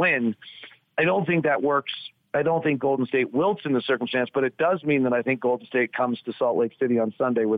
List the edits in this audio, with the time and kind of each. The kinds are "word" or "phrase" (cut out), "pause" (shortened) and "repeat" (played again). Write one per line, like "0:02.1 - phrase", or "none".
none